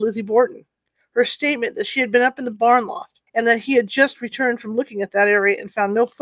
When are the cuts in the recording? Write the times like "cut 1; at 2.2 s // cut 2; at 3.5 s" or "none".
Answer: cut 1; at 3.3 s